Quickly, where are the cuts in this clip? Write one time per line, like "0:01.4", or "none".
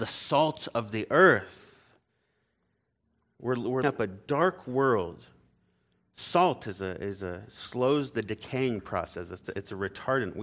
0:03.8

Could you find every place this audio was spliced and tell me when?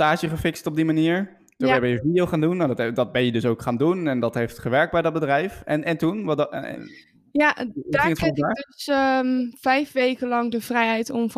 none

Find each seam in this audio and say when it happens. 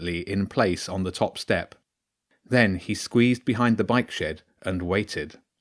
none

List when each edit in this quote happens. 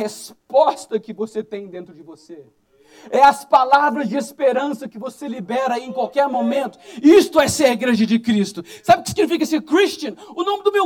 none

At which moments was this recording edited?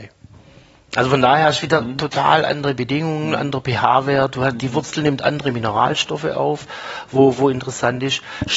none

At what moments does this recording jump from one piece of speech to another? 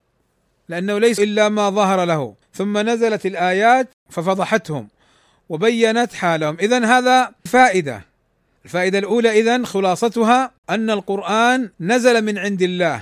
0:01.2
0:02.4
0:04.0
0:07.5
0:10.6
0:11.7

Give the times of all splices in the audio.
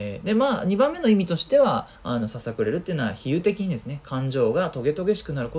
0:02.0

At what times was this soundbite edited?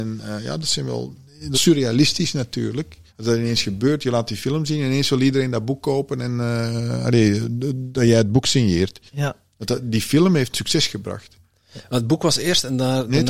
0:01.5
0:03.1
0:09.1
0:10.5

